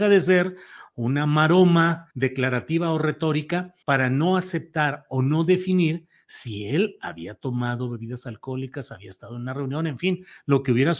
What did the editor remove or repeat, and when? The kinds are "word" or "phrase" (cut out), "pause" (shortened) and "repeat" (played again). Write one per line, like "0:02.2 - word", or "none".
0:02.1 - pause
0:03.8 - pause